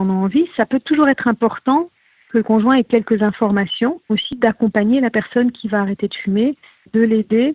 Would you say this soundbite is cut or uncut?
cut